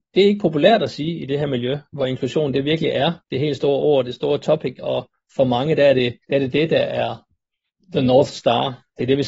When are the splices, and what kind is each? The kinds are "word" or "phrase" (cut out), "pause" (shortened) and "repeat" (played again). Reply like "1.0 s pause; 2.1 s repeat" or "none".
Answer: 3.2 s pause; 6.2 s pause; 7.7 s pause